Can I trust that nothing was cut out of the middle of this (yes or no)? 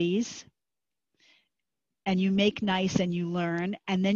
yes